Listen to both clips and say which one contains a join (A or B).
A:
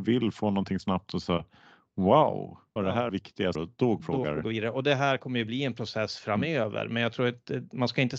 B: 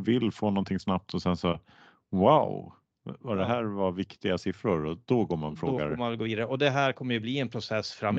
A